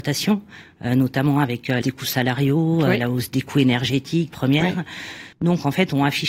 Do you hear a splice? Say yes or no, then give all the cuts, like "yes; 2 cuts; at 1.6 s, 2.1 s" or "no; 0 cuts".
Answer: yes; 3 cuts; at 1.8 s, 4.3 s, 5.3 s